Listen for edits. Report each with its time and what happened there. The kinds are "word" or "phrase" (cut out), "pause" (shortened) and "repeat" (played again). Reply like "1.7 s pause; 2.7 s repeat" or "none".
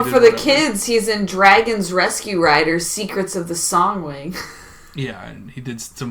none